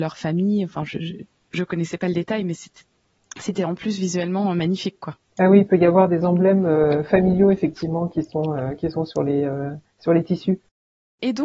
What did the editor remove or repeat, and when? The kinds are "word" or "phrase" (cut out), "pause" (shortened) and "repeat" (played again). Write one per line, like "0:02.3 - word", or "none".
0:01.0 - word
0:05.2 - pause